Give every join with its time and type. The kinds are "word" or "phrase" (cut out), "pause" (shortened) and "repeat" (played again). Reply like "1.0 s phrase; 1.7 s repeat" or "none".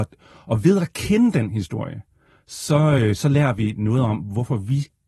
none